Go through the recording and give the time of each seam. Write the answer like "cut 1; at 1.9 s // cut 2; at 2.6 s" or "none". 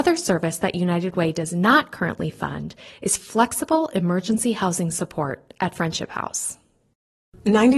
none

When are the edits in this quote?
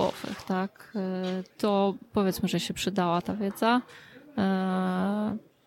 cut 1; at 1.5 s

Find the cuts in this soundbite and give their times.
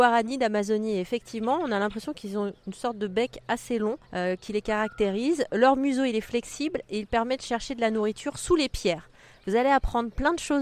cut 1; at 4.0 s

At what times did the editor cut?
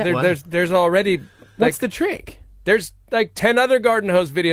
none

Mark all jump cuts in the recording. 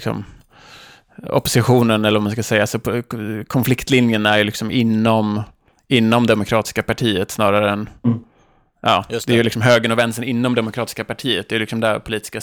none

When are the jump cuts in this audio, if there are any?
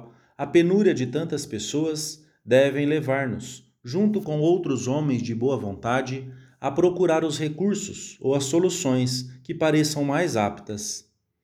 none

